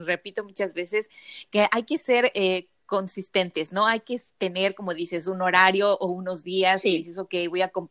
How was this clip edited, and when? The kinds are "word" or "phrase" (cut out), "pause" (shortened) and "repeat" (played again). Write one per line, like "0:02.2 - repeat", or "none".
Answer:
none